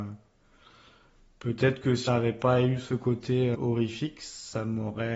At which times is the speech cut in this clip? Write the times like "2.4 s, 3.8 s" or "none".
2.1 s, 3.5 s